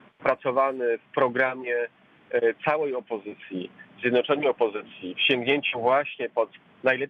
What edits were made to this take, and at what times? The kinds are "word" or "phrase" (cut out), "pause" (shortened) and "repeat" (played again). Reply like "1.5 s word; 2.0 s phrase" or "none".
3.9 s pause